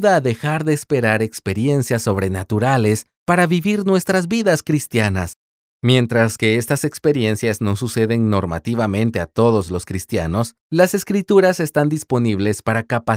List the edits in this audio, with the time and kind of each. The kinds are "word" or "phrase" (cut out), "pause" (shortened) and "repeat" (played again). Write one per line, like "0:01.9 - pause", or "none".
none